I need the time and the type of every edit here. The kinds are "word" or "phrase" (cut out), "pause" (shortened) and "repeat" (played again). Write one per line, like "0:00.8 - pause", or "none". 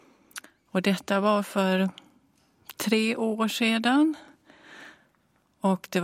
none